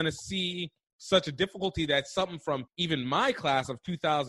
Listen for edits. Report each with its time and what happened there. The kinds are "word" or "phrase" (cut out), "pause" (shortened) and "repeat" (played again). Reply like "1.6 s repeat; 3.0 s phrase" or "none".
2.7 s pause